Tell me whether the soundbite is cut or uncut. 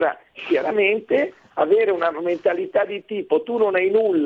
uncut